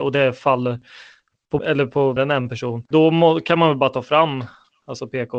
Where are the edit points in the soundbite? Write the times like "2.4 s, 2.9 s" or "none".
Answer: 1.6 s, 2.2 s, 2.9 s